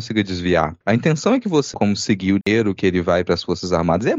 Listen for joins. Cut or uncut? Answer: cut